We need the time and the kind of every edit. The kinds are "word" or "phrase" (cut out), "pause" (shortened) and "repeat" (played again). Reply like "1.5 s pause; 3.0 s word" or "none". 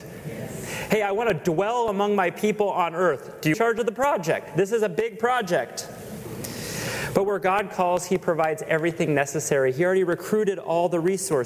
3.5 s phrase